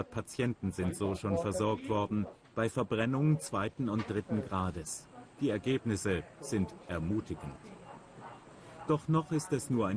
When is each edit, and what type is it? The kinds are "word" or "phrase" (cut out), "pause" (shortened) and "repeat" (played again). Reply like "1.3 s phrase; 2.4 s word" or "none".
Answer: none